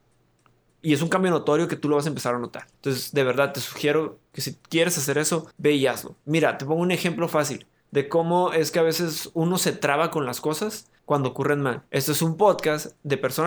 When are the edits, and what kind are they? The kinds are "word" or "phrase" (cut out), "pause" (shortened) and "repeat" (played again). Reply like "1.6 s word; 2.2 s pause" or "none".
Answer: 2.7 s pause; 4.6 s pause; 5.5 s pause; 6.2 s pause; 11.0 s pause; 11.9 s pause